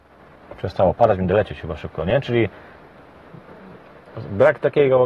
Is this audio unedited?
yes; 0 cuts

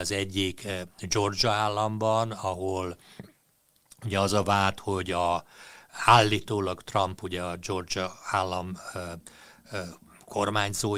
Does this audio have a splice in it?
no; 0 cuts

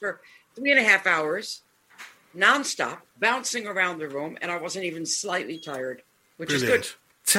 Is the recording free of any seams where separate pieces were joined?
yes; 0 cuts

